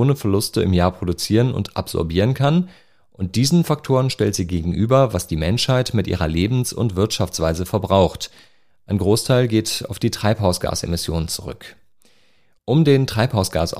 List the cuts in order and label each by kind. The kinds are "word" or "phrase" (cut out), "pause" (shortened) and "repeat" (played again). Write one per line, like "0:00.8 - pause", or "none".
none